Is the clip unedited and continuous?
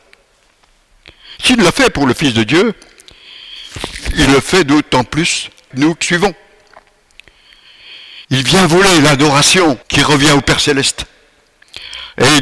no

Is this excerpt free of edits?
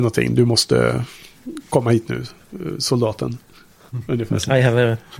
yes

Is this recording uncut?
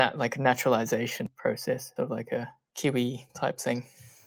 no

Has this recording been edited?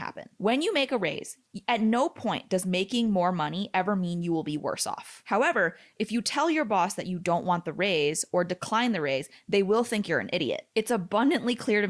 no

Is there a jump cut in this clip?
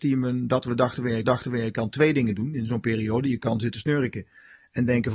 yes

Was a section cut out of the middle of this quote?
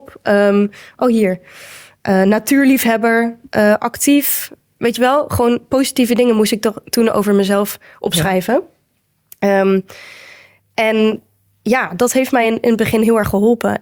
no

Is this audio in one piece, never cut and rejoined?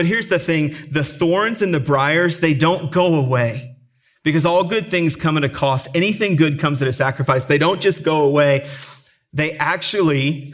yes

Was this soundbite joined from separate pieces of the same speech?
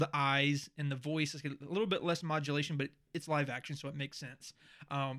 no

